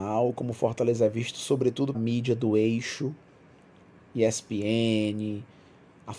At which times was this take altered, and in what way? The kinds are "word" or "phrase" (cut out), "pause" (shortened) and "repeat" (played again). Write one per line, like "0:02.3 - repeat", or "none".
0:01.9 - word